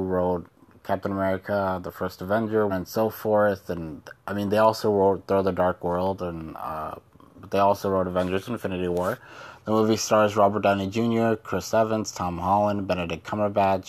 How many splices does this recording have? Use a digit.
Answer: 1